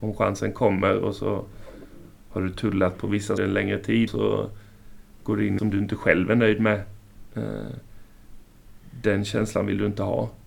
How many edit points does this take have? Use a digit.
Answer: 3